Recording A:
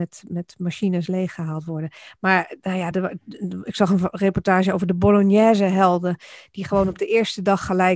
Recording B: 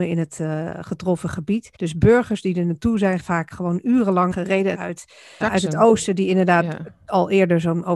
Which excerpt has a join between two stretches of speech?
B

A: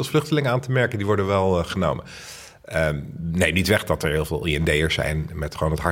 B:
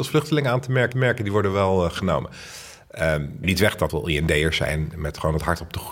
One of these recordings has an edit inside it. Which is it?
B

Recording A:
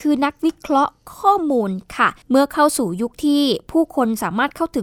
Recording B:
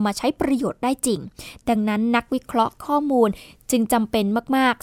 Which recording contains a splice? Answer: A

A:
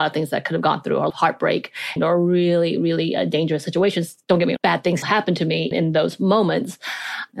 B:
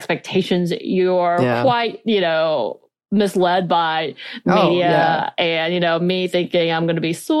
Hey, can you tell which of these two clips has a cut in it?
A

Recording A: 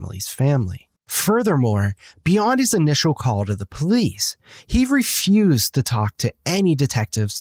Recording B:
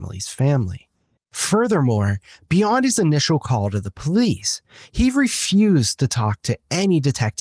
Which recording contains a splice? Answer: A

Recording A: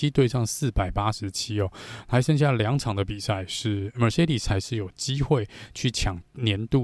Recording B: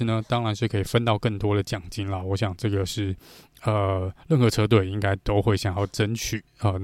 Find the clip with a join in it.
A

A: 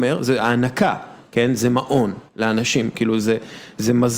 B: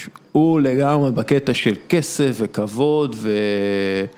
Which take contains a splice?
A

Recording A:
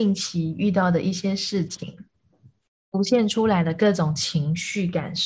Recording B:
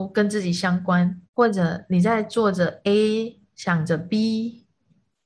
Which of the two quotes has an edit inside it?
B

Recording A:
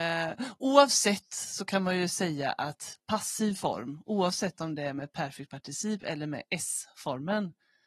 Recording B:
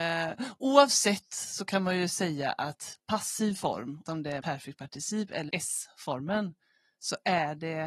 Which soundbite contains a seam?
B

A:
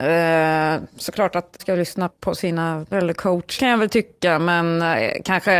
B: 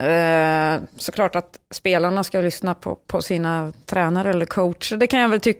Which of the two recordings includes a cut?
A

